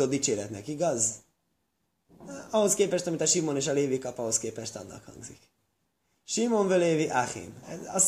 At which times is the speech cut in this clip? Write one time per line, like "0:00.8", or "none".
none